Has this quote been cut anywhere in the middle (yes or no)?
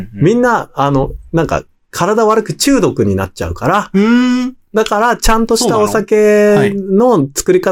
no